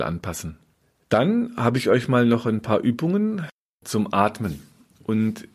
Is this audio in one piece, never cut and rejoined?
yes; 0 cuts

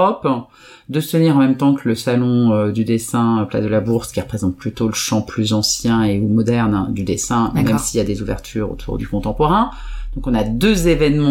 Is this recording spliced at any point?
yes; 1 cut; at 9.0 s

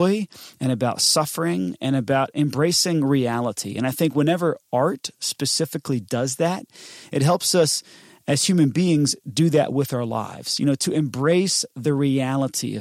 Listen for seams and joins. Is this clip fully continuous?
yes; 0 cuts

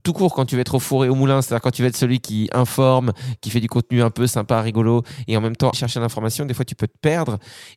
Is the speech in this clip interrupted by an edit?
yes; 1 cut; at 5.7 s

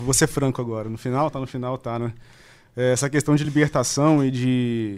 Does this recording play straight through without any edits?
yes; 0 cuts

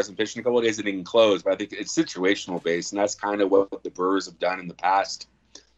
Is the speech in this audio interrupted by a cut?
no; 0 cuts

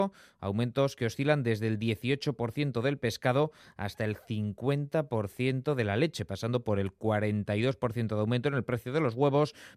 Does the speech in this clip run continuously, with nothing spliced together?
yes; 0 cuts

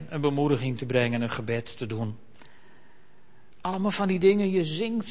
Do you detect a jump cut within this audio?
no; 0 cuts

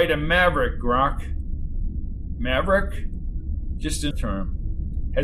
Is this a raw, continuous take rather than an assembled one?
no; 1 cut; at 4.1 s

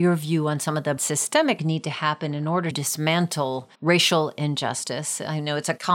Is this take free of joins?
no; 4 cuts; at 1.0 s, 1.6 s, 2.7 s, 3.7 s

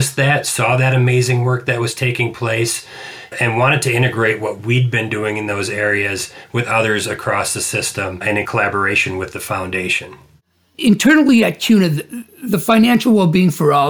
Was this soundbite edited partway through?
no; 0 cuts

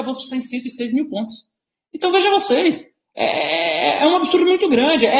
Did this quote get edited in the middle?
no; 0 cuts

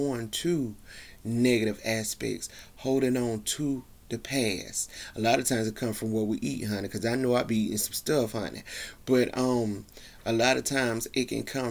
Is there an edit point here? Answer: no; 0 cuts

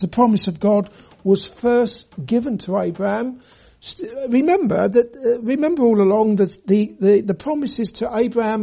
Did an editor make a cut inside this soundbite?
no; 0 cuts

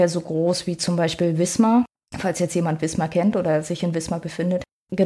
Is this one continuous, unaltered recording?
yes; 0 cuts

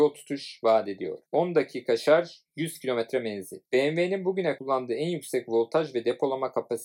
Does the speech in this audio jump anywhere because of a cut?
yes; 3 cuts; at 1.3 s, 3.7 s, 4.6 s

